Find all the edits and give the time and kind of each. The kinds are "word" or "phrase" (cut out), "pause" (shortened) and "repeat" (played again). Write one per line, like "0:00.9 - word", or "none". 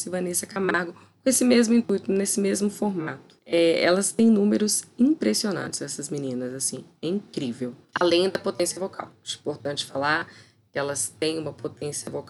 none